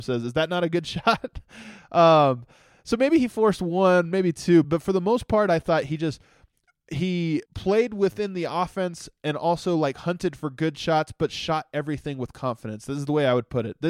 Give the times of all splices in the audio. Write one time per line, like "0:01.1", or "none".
0:04.6
0:07.5